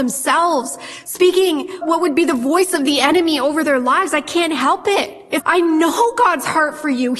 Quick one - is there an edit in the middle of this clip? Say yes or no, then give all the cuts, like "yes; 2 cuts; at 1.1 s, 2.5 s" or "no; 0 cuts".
yes; 2 cuts; at 1.8 s, 5.4 s